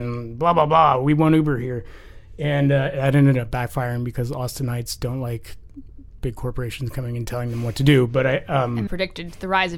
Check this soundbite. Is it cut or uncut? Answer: cut